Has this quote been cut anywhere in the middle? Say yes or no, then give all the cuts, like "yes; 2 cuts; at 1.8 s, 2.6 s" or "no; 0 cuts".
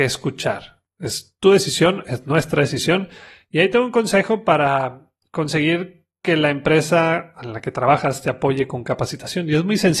no; 0 cuts